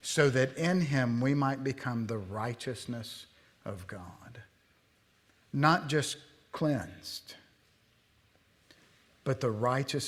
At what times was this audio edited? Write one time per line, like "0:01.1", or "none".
none